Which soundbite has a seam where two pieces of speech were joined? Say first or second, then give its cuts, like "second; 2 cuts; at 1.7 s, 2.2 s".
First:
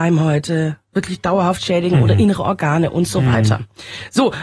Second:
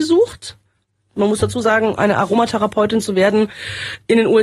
second; 1 cut; at 2.0 s